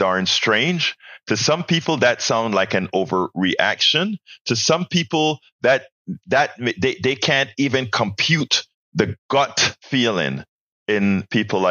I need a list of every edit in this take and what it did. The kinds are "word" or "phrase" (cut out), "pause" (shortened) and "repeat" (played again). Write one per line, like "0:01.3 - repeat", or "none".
0:08.7 - pause
0:10.5 - pause